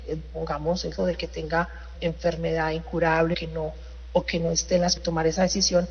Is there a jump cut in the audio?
yes; 4 cuts; at 1.0 s, 1.9 s, 3.3 s, 5.0 s

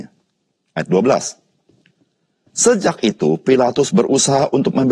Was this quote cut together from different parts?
no; 0 cuts

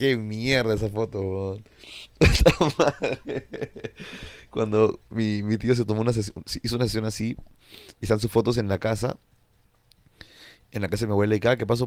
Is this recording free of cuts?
yes; 0 cuts

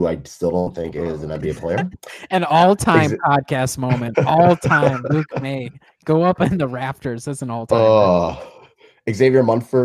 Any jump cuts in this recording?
no; 0 cuts

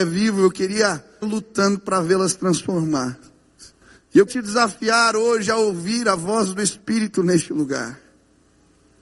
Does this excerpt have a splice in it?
yes; 3 cuts; at 1.2 s, 3.8 s, 4.3 s

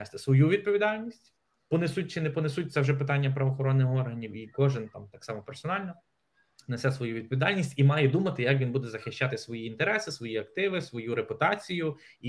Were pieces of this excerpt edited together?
no; 0 cuts

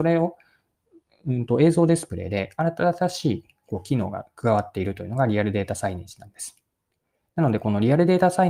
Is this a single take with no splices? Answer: yes; 0 cuts

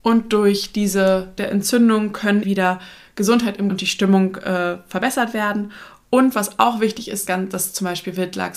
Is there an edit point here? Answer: yes; 4 cuts; at 1.4 s, 2.4 s, 3.7 s, 7.3 s

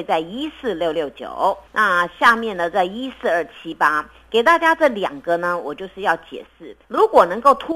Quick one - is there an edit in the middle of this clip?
yes; 2 cuts; at 1.7 s, 6.8 s

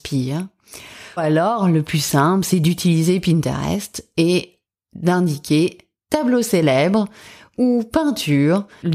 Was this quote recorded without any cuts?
no; 1 cut; at 1.2 s

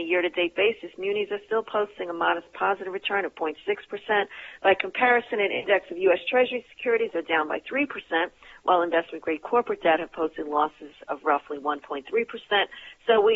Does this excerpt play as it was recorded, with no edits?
yes; 0 cuts

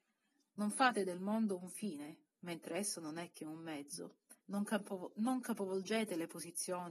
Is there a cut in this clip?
yes; 1 cut; at 4.4 s

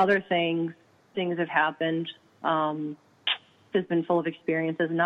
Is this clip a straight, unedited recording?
no; 2 cuts; at 1.1 s, 3.7 s

